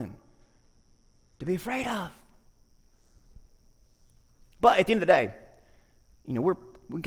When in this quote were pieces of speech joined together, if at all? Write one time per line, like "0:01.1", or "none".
none